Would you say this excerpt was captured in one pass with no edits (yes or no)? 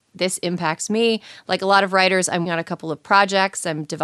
no